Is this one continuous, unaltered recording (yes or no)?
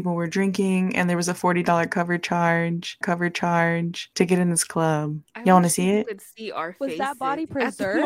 no